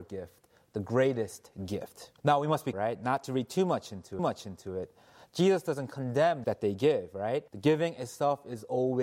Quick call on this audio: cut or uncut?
cut